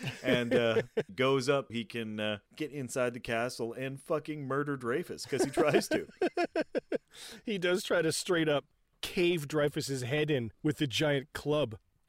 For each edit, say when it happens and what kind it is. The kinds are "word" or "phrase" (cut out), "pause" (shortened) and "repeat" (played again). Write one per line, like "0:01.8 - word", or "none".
0:01.1 - word
0:01.7 - word
0:02.5 - pause